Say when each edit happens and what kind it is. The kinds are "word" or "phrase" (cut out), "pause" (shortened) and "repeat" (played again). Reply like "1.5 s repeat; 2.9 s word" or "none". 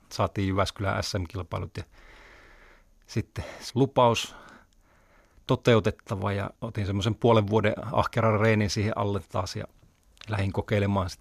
3.7 s word; 6.6 s pause